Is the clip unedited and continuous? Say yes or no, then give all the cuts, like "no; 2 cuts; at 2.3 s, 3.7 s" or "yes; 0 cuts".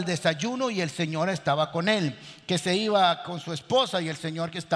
yes; 0 cuts